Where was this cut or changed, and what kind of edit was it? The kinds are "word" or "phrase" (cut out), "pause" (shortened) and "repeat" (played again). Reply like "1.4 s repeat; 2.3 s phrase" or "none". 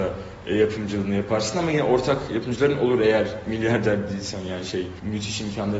none